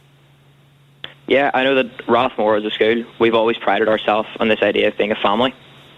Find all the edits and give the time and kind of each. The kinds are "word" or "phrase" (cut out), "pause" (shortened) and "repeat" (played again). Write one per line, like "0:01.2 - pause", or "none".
none